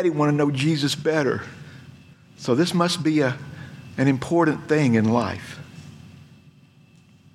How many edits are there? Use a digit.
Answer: 1